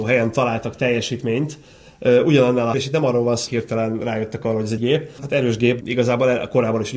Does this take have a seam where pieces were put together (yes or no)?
yes